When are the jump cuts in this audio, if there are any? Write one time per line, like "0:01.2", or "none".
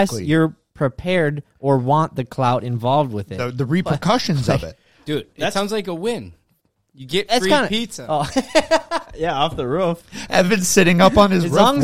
none

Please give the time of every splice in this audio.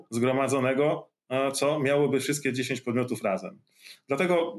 none

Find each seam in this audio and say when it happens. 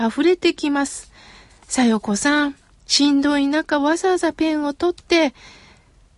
none

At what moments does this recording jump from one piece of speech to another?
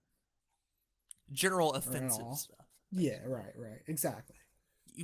none

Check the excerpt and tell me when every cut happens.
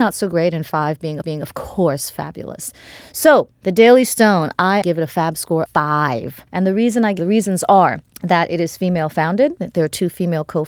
0:01.2
0:03.5
0:04.8
0:05.7
0:06.5
0:07.2
0:08.1

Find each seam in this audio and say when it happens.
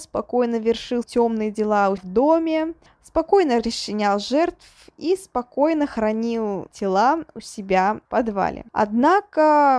0:01.0
0:02.0
0:02.9
0:06.7
0:08.1
0:08.7

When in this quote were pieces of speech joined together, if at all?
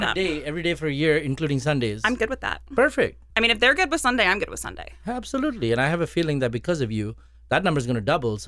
0:03.3

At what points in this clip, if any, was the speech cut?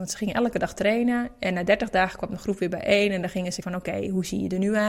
0:03.6

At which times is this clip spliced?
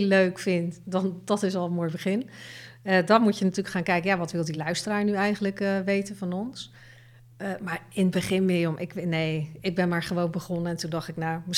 none

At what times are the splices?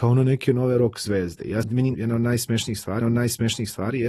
0:01.6
0:01.9
0:03.0

